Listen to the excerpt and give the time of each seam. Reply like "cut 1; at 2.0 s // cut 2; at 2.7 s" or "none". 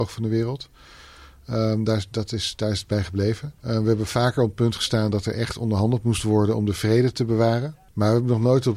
cut 1; at 3.6 s